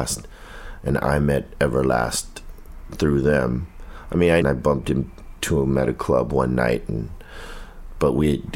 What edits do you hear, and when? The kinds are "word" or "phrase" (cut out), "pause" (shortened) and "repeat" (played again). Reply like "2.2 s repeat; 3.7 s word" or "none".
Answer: 2.9 s word; 4.4 s phrase